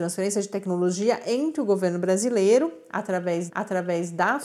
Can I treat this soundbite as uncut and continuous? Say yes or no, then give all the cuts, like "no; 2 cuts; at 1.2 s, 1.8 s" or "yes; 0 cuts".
no; 1 cut; at 3.5 s